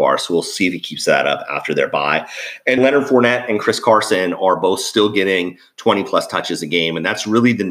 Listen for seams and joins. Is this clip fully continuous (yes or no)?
no